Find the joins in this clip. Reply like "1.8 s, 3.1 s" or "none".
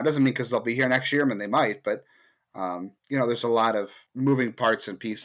3.0 s, 4.1 s